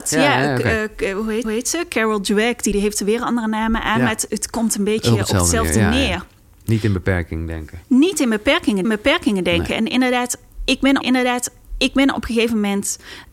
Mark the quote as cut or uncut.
cut